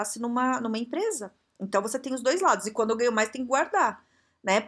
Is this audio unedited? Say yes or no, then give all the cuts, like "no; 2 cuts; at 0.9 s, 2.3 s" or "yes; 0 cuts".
yes; 0 cuts